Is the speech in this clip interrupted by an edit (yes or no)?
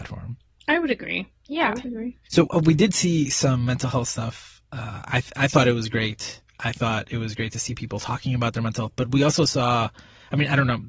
yes